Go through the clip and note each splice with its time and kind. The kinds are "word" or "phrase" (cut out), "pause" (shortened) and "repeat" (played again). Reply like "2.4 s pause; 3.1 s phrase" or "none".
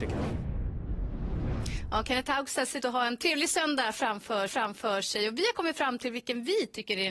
2.8 s word; 4.5 s repeat